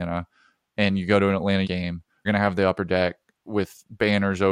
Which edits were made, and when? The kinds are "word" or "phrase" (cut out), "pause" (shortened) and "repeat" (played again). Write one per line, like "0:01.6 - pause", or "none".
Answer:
0:01.6 - word
0:02.3 - word
0:03.4 - word